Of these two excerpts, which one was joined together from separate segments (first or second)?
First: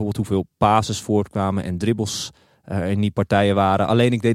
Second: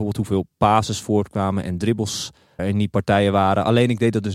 second